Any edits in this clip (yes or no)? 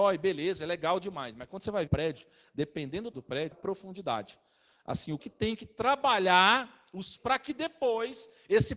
yes